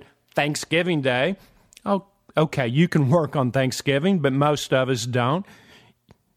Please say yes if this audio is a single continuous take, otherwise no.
yes